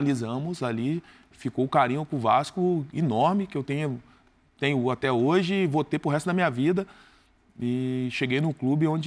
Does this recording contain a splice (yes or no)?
no